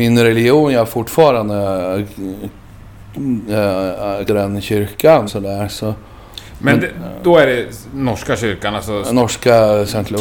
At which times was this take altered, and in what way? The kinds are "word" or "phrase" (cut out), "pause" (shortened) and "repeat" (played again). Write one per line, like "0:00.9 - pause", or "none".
0:04.3 - word
0:05.3 - word